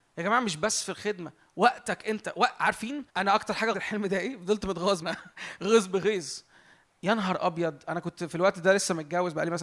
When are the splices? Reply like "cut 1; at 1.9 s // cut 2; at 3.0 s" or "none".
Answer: cut 1; at 3.1 s // cut 2; at 3.7 s // cut 3; at 5.0 s

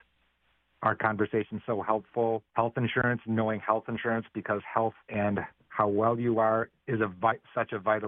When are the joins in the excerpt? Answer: cut 1; at 2.5 s // cut 2; at 5.0 s // cut 3; at 6.8 s

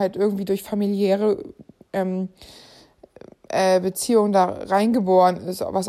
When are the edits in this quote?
none

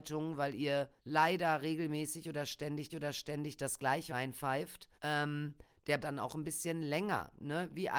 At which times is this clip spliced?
cut 1; at 1.0 s // cut 2; at 2.9 s // cut 3; at 4.1 s // cut 4; at 4.9 s // cut 5; at 6.0 s

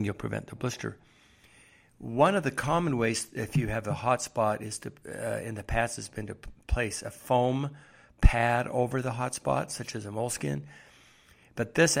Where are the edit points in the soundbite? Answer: none

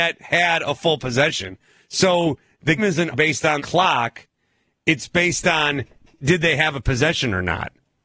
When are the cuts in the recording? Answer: cut 1; at 2.8 s // cut 2; at 3.1 s // cut 3; at 3.6 s

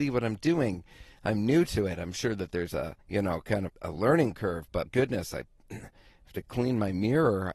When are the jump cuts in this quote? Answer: cut 1; at 3.0 s // cut 2; at 3.7 s // cut 3; at 4.9 s

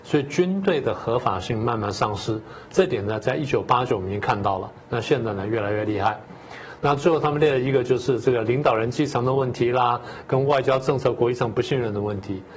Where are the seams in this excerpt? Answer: none

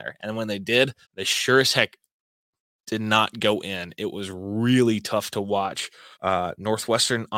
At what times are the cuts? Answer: cut 1; at 1.0 s // cut 2; at 6.1 s

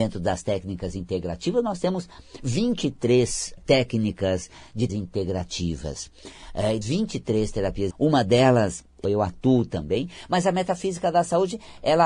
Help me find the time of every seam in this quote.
cut 1; at 3.6 s // cut 2; at 4.9 s // cut 3; at 6.8 s // cut 4; at 7.9 s // cut 5; at 9.0 s

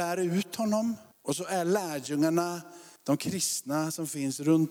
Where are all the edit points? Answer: cut 1; at 1.1 s // cut 2; at 3.0 s

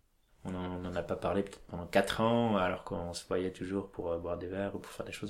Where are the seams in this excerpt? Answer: none

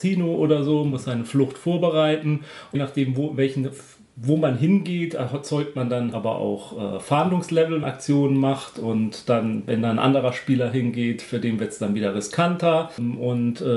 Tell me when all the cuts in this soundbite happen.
cut 1; at 2.7 s // cut 2; at 6.1 s // cut 3; at 7.8 s

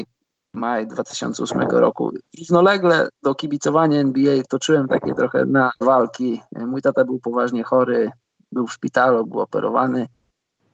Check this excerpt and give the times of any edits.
cut 1; at 3.2 s // cut 2; at 5.8 s

